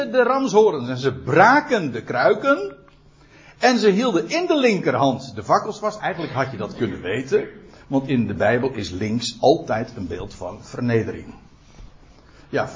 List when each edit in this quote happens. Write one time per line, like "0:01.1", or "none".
none